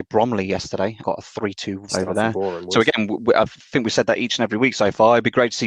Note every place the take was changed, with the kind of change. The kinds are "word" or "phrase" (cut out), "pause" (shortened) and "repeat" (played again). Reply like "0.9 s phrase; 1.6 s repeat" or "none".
1.0 s word; 1.9 s word